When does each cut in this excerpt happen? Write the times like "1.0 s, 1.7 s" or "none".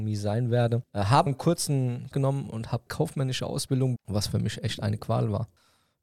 1.3 s, 2.1 s, 2.9 s, 4.0 s

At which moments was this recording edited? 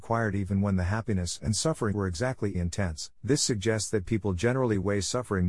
1.9 s, 2.5 s, 3.1 s

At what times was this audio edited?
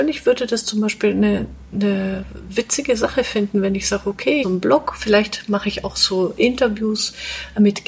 4.4 s

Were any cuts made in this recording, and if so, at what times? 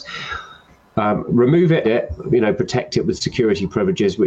1.8 s

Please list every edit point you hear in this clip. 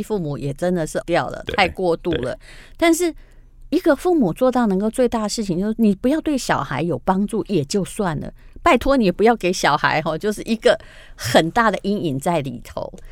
1.0 s

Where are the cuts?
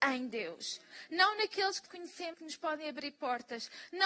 1.9 s, 2.3 s

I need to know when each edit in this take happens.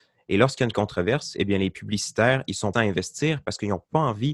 2.7 s

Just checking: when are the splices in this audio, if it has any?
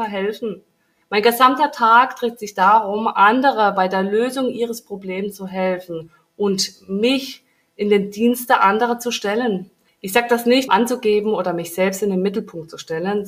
10.7 s

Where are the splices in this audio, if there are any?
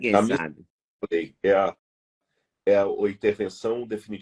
none

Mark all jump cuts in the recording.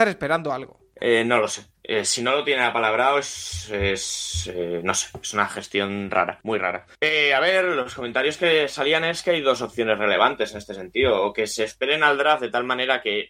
6.4 s, 6.9 s

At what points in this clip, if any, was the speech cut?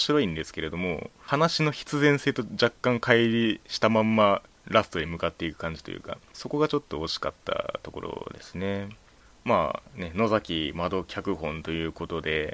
none

